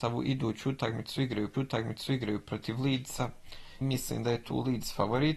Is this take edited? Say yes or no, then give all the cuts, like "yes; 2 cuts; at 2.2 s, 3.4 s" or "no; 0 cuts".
yes; 2 cuts; at 1.5 s, 3.8 s